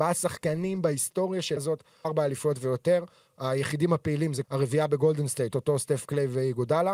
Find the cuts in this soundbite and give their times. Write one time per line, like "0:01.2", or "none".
0:01.6
0:02.0
0:04.4
0:05.5